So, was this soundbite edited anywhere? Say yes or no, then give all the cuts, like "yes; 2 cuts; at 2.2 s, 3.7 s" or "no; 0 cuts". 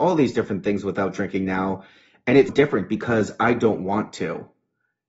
yes; 1 cut; at 2.5 s